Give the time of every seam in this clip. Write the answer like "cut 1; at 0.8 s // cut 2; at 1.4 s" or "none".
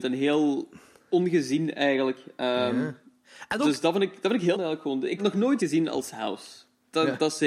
cut 1; at 4.5 s // cut 2; at 5.2 s // cut 3; at 5.6 s